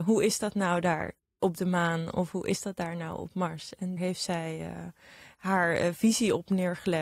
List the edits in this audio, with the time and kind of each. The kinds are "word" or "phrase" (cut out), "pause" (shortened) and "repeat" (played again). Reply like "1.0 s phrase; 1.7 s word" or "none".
4.0 s word